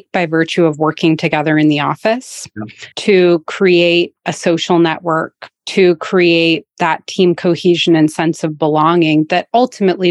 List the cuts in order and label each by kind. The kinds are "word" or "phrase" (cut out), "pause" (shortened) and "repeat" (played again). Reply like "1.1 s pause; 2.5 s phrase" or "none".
2.9 s pause; 5.6 s pause

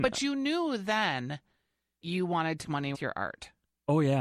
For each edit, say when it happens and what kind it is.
2.0 s word; 2.6 s word; 2.9 s word

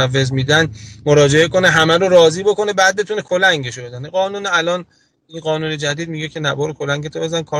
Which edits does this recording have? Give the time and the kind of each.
none

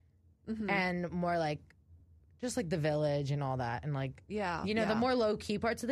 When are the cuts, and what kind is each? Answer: none

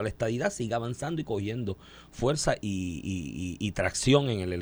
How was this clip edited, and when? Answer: none

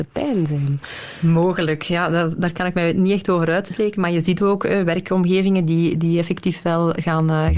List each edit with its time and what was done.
none

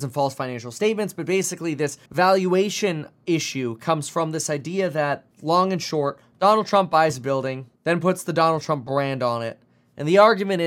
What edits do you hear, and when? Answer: 2.1 s pause; 5.3 s pause; 7.8 s pause

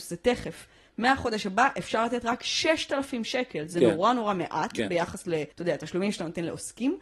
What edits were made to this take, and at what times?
5.5 s pause

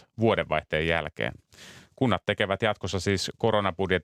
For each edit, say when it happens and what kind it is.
none

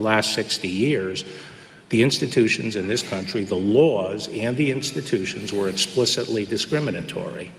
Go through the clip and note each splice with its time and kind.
none

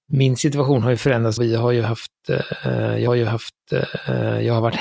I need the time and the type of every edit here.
1.4 s phrase; 3.1 s repeat

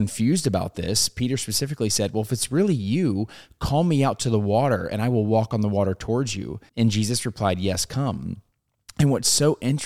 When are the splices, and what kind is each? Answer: 6.7 s pause

